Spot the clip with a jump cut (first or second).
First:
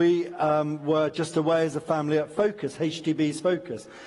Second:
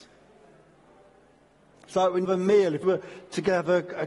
second